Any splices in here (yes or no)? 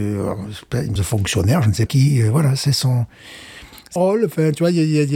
yes